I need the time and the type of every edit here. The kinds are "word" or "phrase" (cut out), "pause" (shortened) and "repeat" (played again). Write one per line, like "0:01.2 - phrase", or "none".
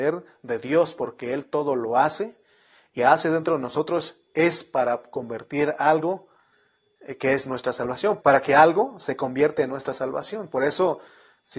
0:03.0 - phrase
0:08.2 - word